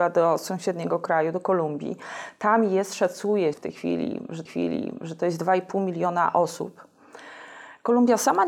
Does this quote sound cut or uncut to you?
cut